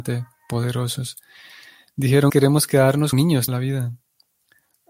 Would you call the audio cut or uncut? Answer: cut